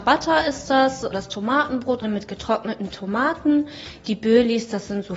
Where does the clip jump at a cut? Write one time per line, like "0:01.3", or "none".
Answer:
0:01.1
0:02.0